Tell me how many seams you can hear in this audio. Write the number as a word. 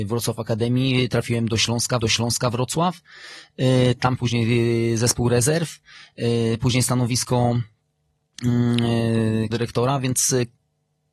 three